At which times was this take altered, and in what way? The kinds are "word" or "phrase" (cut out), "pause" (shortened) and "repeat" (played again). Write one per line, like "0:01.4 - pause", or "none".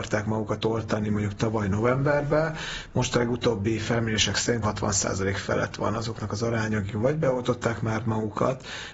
0:04.6 - word